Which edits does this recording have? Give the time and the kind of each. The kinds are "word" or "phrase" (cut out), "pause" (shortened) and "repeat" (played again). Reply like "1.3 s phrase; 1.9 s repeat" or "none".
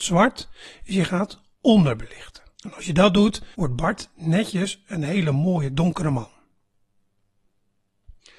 2.5 s pause; 3.5 s pause